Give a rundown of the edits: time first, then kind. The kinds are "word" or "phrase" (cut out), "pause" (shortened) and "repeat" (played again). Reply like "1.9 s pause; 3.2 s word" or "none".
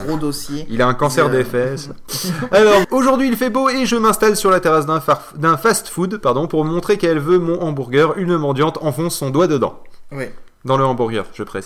2.8 s word